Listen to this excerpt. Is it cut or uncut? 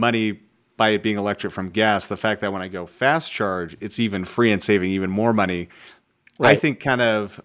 uncut